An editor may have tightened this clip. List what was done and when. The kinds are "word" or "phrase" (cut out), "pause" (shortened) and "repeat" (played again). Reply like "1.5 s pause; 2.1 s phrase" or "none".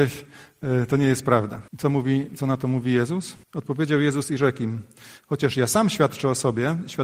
1.7 s pause; 3.4 s pause